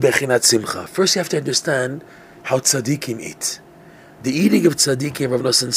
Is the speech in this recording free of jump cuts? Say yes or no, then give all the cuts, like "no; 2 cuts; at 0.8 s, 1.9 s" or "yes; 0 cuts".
yes; 0 cuts